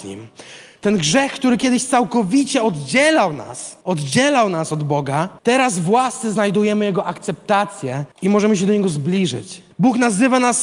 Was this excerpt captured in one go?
no; 4 cuts; at 3.8 s, 5.4 s, 8.1 s, 9.7 s

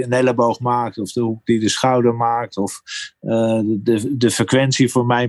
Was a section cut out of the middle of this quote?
no; 0 cuts

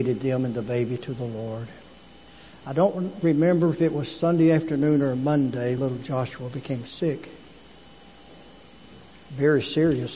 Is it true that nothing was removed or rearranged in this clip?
no; 1 cut; at 5.8 s

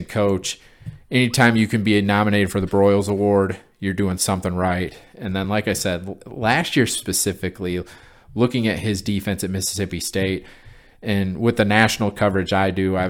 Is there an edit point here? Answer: no; 0 cuts

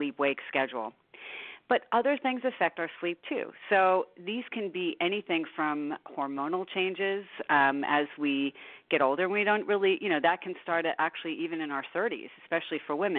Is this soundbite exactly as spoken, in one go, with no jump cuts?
yes; 0 cuts

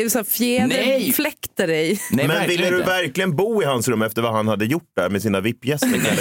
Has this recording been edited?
no; 0 cuts

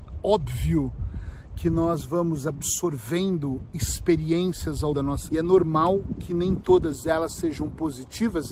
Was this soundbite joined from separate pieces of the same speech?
yes; 2 cuts; at 4.9 s, 5.3 s

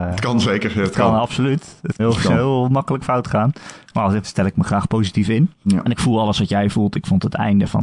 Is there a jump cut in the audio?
yes; 3 cuts; at 2.0 s, 4.2 s, 5.5 s

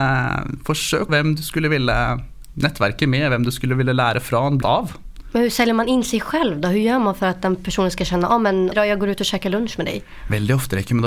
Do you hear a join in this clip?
yes; 3 cuts; at 1.1 s, 4.6 s, 8.7 s

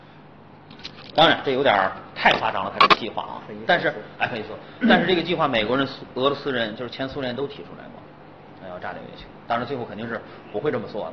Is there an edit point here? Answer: no; 0 cuts

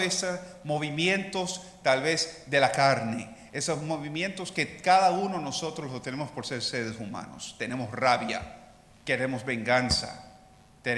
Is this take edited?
no; 0 cuts

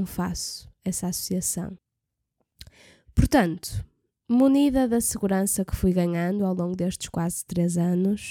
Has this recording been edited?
no; 0 cuts

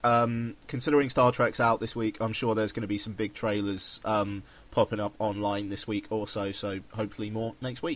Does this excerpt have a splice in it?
no; 0 cuts

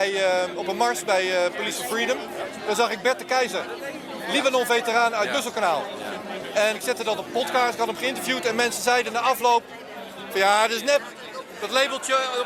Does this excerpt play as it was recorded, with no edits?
no; 1 cut; at 6.7 s

